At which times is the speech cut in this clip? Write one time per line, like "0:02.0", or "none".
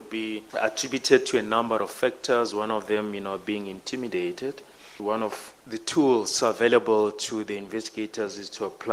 none